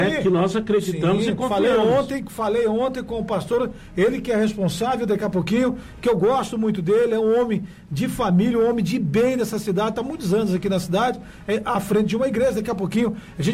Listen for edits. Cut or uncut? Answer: uncut